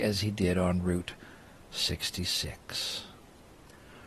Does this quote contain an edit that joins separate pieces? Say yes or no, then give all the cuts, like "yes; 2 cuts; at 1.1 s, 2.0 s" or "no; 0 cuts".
no; 0 cuts